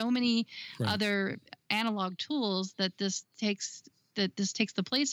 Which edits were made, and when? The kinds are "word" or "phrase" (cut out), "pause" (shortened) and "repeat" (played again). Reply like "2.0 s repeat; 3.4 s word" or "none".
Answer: none